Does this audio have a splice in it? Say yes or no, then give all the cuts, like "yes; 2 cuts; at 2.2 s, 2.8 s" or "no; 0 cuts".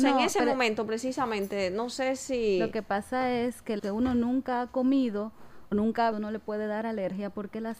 yes; 3 cuts; at 3.8 s, 5.7 s, 6.1 s